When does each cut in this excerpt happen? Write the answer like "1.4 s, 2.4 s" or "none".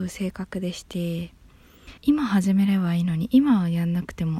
2.0 s